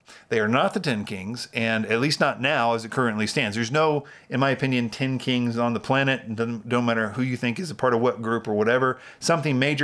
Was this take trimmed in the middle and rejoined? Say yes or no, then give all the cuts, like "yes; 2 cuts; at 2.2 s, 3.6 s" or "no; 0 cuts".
no; 0 cuts